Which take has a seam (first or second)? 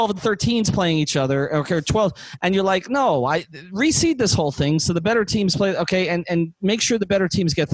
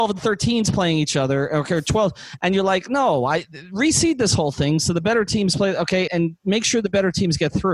second